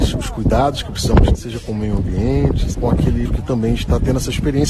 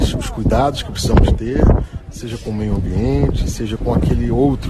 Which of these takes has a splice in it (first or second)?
first